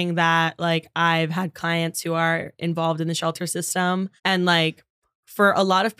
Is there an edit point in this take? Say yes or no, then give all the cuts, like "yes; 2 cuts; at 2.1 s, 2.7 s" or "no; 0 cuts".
yes; 1 cut; at 4.2 s